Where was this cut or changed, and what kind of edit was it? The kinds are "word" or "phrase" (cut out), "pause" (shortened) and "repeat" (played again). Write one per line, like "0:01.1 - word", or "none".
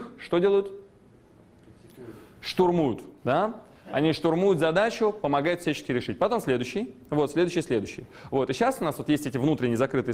0:03.2 - pause